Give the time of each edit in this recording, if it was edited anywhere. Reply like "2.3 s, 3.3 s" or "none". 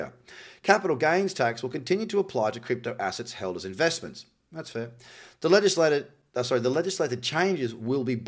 none